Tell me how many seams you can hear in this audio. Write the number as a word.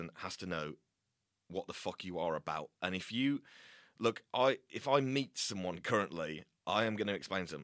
zero